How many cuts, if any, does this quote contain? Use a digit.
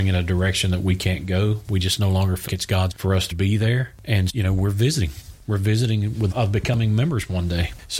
5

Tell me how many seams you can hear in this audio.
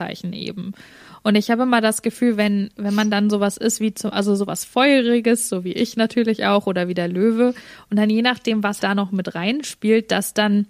1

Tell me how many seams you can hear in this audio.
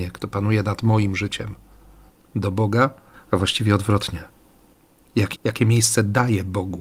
3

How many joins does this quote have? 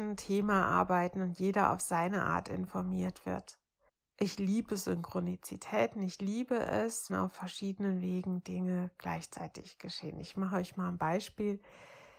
2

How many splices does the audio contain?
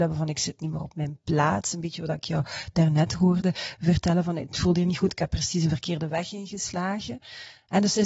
0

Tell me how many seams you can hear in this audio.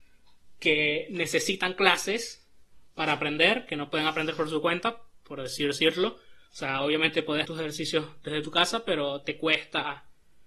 1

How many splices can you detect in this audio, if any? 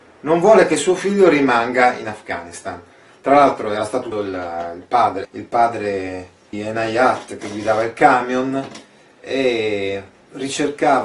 3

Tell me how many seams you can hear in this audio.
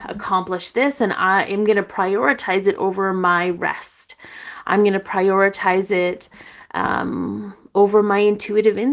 0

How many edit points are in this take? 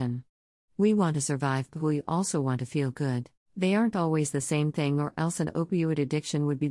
1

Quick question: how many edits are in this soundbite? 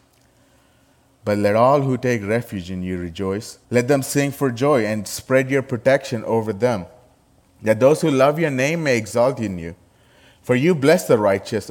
1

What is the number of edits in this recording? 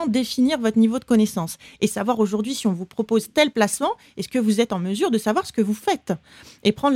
0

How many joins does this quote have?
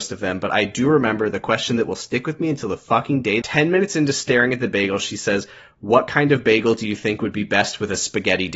1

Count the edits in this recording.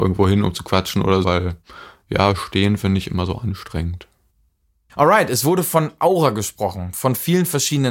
1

